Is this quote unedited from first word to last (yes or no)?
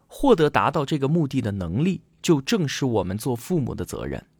yes